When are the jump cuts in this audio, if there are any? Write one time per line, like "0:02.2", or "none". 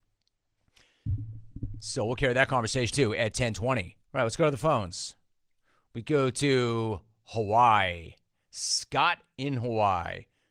0:02.9
0:04.0